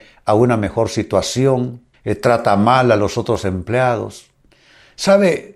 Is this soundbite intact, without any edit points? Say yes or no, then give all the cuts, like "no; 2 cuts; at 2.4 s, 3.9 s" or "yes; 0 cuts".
no; 1 cut; at 1.9 s